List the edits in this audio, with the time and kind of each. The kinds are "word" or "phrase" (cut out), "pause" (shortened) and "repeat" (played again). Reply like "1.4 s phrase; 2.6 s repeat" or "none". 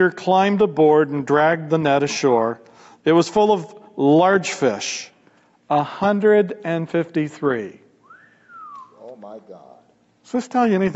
none